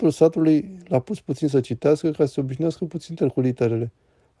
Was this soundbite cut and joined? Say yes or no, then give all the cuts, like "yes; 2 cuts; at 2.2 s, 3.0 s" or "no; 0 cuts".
no; 0 cuts